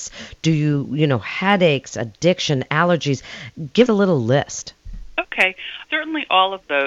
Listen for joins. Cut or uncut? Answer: cut